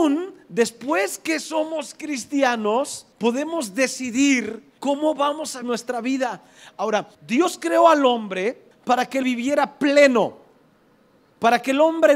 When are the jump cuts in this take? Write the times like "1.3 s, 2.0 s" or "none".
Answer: 3.1 s, 4.8 s, 5.6 s, 7.1 s, 8.7 s, 9.2 s

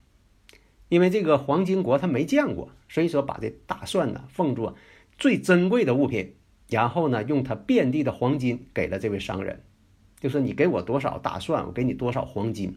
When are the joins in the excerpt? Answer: none

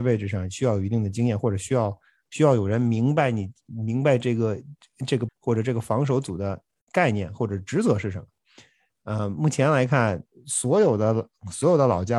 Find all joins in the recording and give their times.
5.3 s

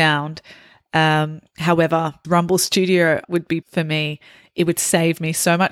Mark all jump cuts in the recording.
2.2 s, 3.2 s, 3.6 s

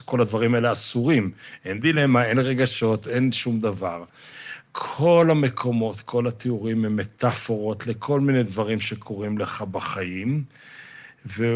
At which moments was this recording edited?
4.7 s

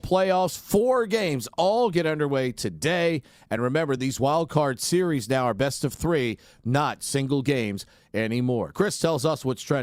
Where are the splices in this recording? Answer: none

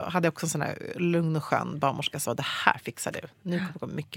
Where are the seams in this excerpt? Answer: 2.3 s

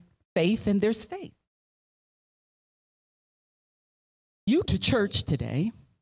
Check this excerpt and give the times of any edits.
4.7 s

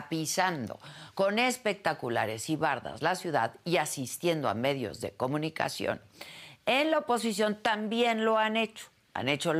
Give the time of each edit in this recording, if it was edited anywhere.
none

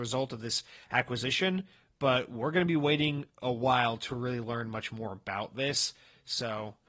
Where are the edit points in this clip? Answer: none

